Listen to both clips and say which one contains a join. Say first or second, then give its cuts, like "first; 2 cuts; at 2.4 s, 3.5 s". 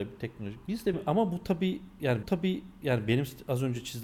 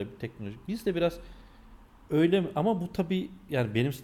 first; 2 cuts; at 0.9 s, 2.2 s